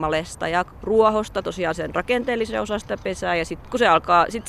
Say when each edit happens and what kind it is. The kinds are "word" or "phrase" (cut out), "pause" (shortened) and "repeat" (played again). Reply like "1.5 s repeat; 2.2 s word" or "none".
none